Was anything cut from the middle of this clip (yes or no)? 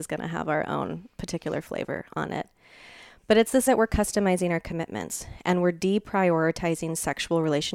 yes